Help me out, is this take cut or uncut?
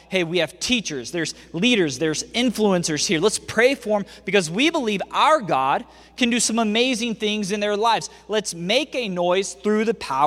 uncut